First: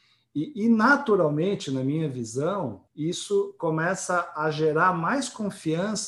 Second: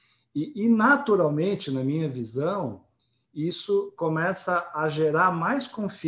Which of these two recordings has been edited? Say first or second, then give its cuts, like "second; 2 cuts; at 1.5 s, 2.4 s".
first; 1 cut; at 2.9 s